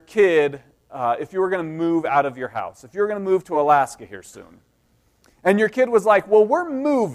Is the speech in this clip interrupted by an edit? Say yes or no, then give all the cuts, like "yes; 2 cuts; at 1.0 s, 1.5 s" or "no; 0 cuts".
no; 0 cuts